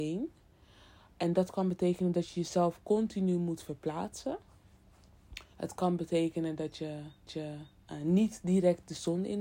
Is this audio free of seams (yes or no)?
no